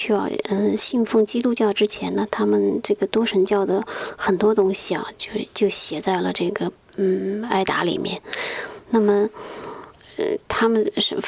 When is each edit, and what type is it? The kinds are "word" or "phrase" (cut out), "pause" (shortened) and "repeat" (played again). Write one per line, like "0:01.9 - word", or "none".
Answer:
none